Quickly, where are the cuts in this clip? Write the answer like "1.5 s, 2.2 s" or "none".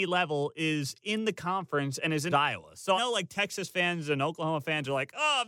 2.3 s, 3.0 s